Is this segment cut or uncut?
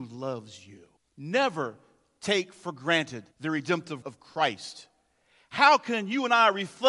cut